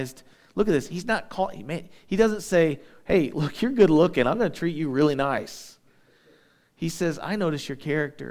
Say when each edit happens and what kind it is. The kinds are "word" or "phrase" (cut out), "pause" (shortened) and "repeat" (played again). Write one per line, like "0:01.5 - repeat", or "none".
none